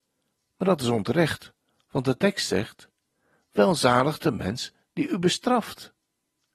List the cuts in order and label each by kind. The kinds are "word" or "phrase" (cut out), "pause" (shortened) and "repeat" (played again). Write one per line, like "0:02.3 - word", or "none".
none